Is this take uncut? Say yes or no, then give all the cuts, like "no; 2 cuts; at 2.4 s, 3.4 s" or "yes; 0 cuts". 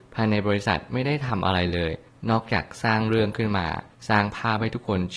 yes; 0 cuts